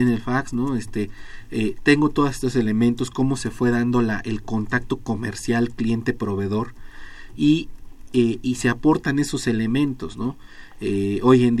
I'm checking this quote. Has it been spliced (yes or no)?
no